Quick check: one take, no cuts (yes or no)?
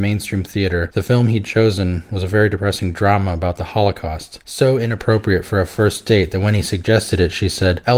yes